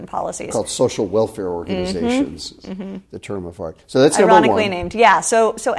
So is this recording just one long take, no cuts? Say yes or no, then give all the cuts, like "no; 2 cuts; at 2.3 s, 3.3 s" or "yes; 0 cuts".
yes; 0 cuts